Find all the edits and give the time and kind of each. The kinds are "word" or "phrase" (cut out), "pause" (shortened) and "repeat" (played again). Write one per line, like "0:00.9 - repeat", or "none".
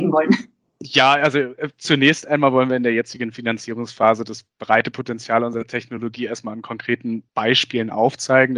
0:07.3 - pause